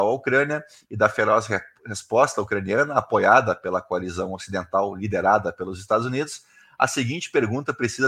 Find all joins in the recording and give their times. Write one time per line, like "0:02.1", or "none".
none